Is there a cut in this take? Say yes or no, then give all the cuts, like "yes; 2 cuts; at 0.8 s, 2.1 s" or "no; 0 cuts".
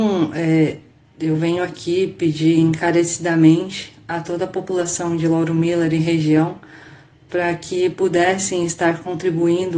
no; 0 cuts